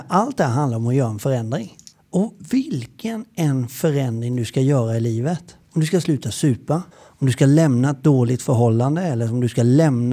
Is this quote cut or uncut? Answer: cut